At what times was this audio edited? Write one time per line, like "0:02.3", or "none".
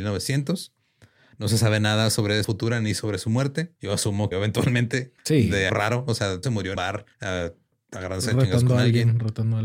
0:02.4
0:03.8
0:04.3
0:05.2
0:05.7
0:06.4
0:06.7
0:07.1

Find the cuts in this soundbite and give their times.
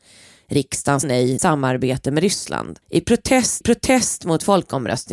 0:01.0
0:01.4
0:02.8
0:03.6

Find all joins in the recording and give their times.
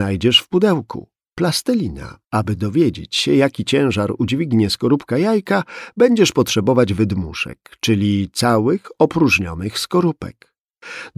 0:02.2

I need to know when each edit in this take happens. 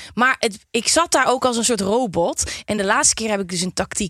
none

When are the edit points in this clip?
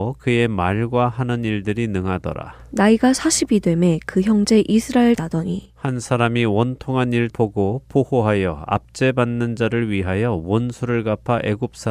0:05.2
0:07.3

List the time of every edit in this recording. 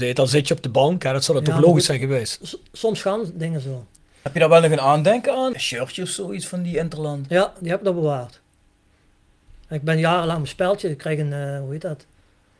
none

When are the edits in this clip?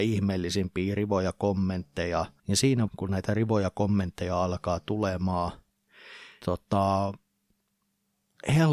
0:02.4
0:02.9
0:06.4

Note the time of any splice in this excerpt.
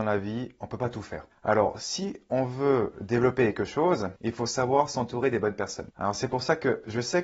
none

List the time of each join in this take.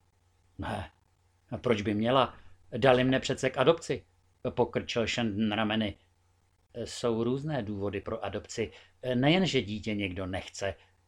none

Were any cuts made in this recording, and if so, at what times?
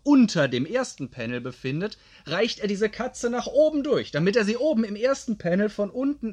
none

